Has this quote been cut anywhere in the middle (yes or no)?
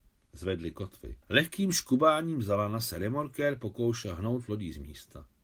yes